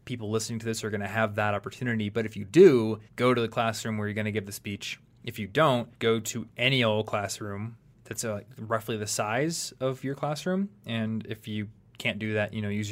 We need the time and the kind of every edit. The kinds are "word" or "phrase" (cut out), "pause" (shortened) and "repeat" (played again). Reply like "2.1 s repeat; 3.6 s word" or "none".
3.1 s pause; 5.9 s pause; 7.9 s pause